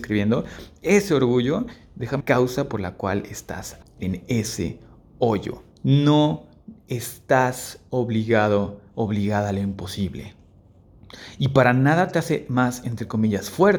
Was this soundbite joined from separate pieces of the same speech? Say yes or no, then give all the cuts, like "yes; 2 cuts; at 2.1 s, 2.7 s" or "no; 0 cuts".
yes; 3 cuts; at 2.2 s, 3.8 s, 5.7 s